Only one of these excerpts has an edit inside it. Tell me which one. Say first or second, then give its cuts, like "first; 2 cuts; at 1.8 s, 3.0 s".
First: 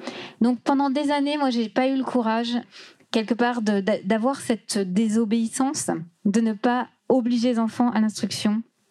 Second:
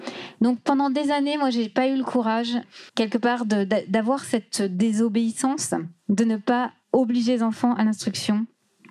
second; 1 cut; at 2.9 s